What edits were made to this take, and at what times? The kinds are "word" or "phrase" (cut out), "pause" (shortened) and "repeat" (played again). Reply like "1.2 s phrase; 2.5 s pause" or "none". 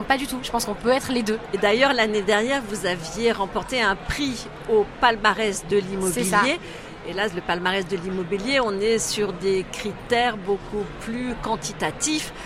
none